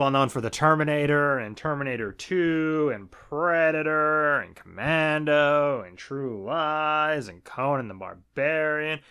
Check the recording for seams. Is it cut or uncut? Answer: uncut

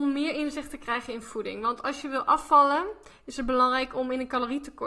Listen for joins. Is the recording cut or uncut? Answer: uncut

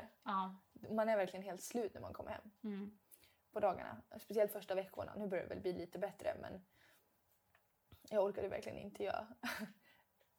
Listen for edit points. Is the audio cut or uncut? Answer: uncut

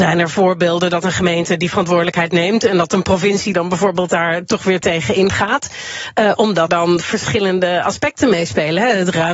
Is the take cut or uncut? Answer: cut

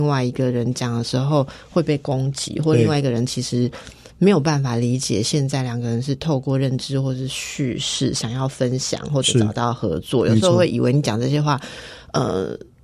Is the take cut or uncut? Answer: uncut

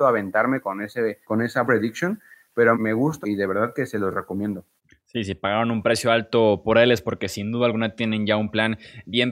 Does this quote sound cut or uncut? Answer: cut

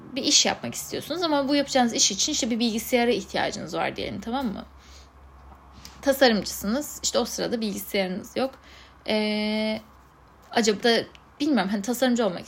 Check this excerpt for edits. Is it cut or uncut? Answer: cut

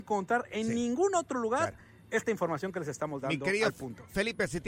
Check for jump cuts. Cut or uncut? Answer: uncut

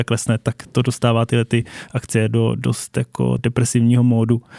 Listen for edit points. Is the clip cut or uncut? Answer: cut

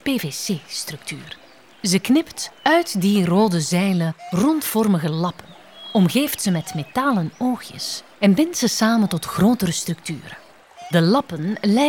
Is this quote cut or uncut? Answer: uncut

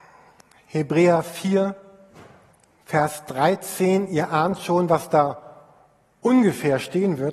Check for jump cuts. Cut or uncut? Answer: uncut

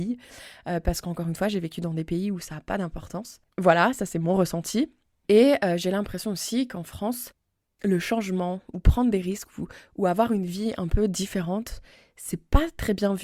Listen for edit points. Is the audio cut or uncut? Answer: uncut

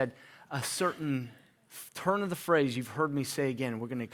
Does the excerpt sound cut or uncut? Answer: uncut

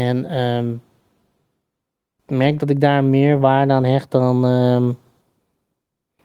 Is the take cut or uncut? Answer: uncut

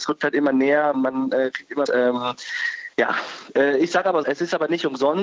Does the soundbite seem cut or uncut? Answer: cut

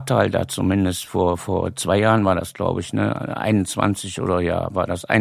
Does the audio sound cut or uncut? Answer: uncut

